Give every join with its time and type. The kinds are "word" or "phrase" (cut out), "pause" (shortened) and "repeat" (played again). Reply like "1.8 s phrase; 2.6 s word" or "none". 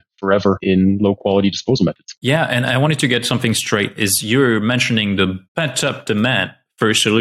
5.4 s pause